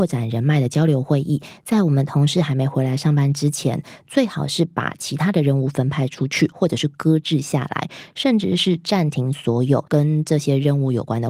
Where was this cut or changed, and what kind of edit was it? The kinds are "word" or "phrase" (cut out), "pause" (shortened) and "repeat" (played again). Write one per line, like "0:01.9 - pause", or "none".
0:09.9 - pause